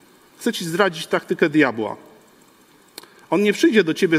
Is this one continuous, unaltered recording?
yes; 0 cuts

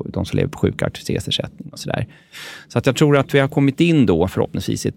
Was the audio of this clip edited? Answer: no; 0 cuts

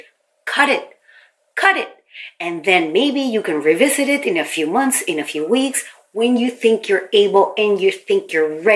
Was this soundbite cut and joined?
no; 0 cuts

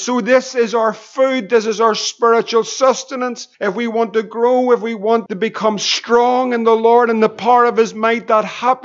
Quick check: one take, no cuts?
no; 2 cuts; at 3.5 s, 5.3 s

